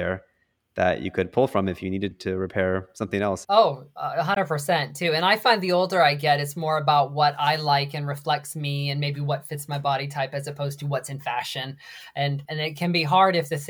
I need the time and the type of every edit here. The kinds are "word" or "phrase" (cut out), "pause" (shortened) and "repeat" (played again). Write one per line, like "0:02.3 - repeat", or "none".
none